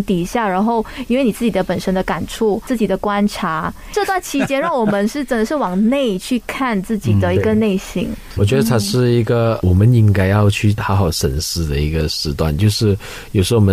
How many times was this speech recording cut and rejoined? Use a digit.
1